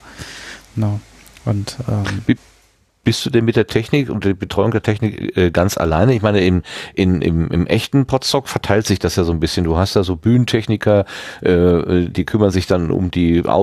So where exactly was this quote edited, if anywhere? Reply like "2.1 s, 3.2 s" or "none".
12.1 s